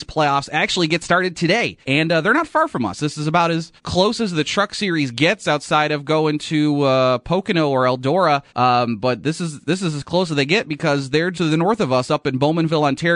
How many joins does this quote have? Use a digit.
4